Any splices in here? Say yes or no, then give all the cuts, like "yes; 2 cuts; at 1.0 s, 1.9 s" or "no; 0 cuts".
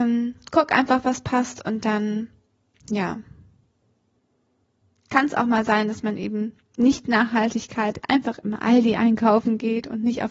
no; 0 cuts